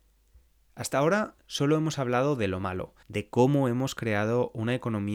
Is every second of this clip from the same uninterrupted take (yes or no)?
no